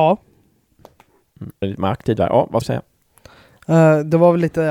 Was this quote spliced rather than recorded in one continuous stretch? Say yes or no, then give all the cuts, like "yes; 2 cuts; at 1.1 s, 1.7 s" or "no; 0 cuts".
yes; 2 cuts; at 1.6 s, 2.6 s